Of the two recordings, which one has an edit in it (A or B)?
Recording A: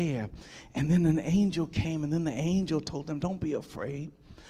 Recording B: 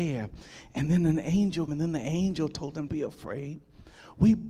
B